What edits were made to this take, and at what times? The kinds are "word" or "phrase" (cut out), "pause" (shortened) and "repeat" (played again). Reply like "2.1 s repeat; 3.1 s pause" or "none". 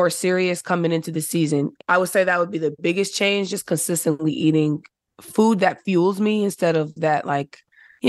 none